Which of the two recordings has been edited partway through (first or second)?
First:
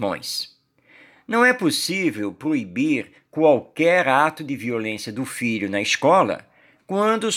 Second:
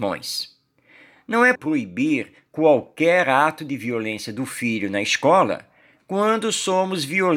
second